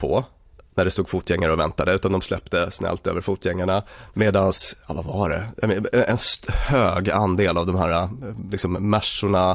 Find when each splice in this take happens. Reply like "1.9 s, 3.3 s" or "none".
none